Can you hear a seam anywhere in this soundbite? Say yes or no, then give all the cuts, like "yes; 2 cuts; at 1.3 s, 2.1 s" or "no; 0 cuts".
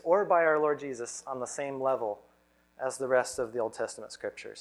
no; 0 cuts